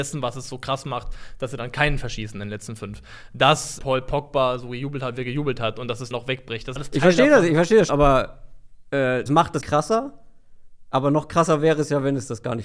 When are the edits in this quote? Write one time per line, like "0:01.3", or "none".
0:03.8
0:06.1
0:06.8
0:07.9
0:09.3
0:09.6